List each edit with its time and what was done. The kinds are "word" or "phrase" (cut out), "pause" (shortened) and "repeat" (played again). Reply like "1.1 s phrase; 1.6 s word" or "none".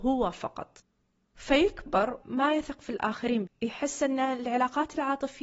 2.2 s word; 3.5 s word